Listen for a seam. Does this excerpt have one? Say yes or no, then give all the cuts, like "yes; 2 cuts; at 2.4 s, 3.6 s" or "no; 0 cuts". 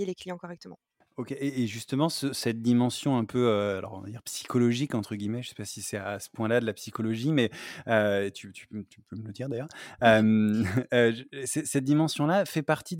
no; 0 cuts